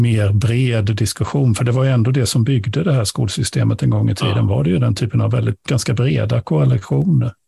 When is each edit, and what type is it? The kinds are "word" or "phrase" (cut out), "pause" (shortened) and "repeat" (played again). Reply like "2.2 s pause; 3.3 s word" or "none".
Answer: 5.7 s word